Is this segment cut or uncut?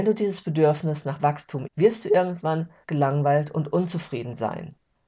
cut